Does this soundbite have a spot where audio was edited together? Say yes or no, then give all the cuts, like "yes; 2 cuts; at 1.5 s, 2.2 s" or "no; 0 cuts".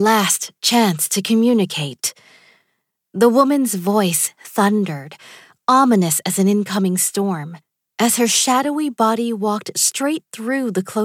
no; 0 cuts